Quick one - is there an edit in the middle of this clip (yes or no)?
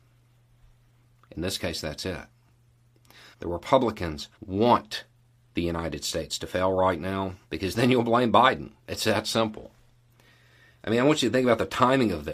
yes